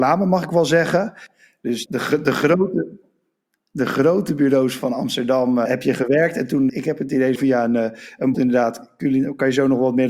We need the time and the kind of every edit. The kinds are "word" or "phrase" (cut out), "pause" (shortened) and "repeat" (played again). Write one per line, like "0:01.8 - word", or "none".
0:01.9 - word
0:04.8 - word
0:05.7 - word
0:06.7 - word
0:07.4 - word
0:08.3 - word